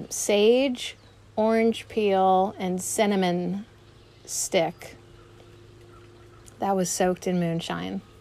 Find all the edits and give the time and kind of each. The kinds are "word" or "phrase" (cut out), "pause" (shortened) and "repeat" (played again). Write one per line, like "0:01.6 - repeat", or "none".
none